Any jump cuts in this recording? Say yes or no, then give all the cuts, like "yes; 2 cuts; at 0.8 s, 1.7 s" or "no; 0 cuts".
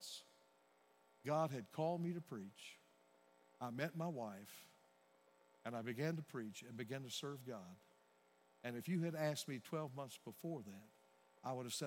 no; 0 cuts